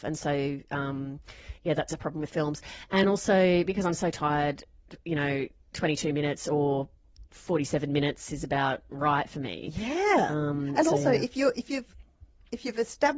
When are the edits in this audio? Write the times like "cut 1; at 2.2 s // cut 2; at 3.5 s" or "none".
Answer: none